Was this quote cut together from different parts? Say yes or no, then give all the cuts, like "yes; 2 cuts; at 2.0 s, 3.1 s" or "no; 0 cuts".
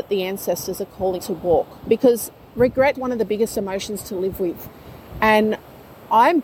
yes; 3 cuts; at 1.2 s, 1.8 s, 2.9 s